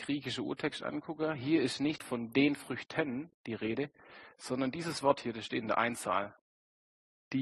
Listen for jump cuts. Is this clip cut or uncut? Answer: uncut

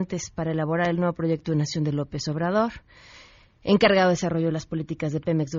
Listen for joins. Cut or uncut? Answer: uncut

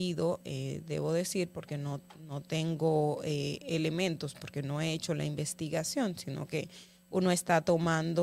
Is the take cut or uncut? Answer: uncut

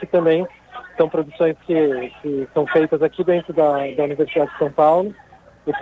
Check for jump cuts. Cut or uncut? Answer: uncut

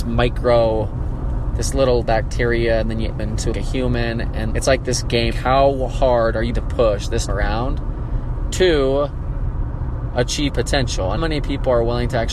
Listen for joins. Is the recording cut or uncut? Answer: cut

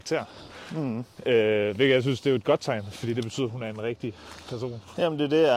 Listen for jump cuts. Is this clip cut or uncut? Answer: uncut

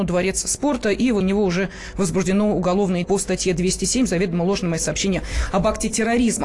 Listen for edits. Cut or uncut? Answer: cut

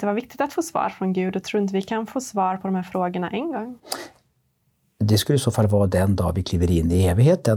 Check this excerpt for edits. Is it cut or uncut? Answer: uncut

